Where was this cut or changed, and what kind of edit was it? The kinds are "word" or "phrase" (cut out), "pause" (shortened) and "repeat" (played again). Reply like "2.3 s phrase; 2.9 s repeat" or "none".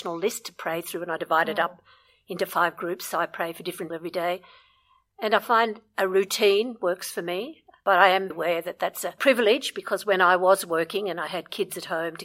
3.9 s word; 8.3 s word